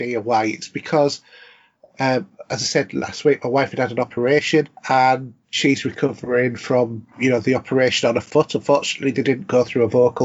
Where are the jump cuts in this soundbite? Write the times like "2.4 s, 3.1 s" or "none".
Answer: 4.8 s